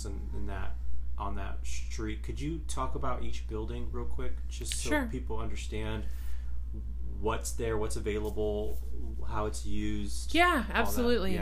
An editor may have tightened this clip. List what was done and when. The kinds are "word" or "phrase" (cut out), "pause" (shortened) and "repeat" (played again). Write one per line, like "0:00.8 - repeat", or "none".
none